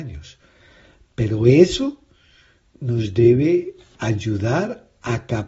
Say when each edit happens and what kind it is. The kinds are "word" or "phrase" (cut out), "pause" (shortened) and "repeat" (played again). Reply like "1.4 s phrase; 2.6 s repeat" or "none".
none